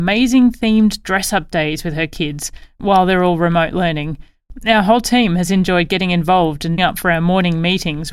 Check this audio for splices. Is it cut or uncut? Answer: cut